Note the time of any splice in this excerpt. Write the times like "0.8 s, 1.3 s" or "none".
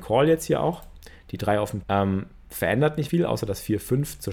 1.8 s, 3.1 s